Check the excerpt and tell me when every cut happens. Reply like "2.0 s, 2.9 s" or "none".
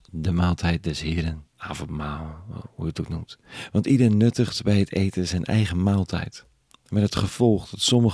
1.5 s